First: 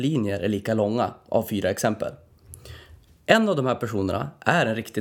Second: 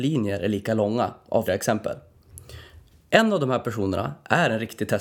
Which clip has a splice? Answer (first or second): second